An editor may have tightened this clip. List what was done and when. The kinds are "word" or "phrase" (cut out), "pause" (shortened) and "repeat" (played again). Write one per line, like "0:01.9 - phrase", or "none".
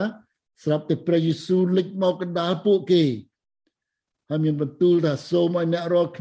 none